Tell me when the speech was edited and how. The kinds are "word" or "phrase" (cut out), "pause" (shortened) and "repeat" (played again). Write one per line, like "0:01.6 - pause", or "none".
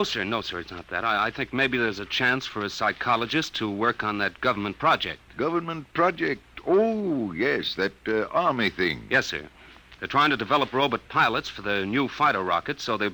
none